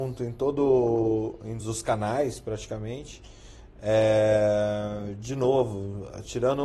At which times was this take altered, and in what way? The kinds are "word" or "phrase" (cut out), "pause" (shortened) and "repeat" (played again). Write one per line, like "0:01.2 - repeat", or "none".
0:01.6 - word